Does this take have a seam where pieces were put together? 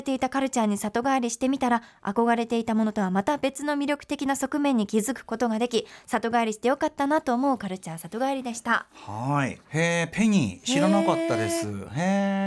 yes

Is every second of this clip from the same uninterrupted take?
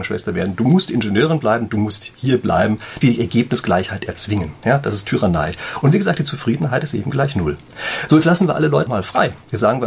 no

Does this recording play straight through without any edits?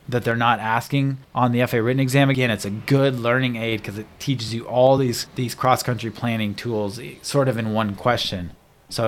yes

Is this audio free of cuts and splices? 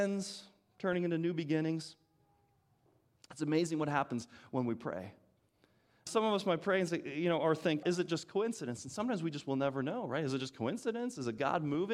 no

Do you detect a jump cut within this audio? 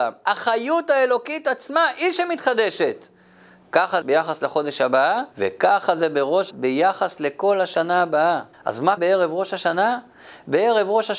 yes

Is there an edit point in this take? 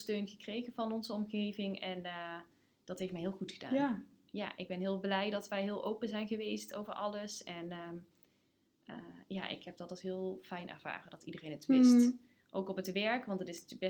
no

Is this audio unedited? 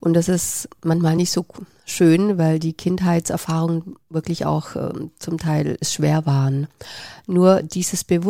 yes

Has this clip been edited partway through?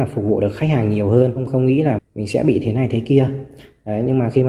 yes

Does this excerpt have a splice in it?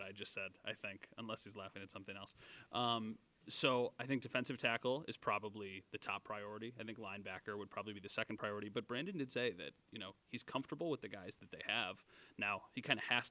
no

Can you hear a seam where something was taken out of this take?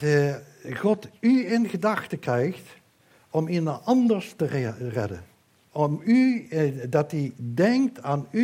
no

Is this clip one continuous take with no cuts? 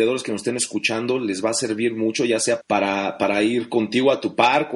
no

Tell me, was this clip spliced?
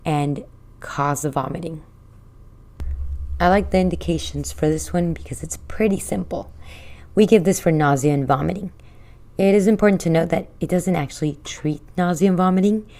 no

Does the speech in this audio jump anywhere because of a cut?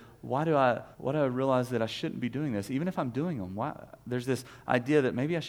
yes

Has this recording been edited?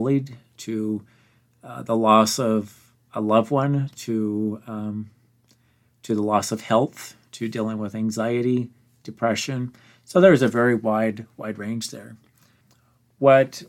no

